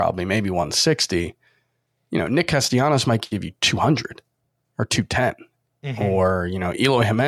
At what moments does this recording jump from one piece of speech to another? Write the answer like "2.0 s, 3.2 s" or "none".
none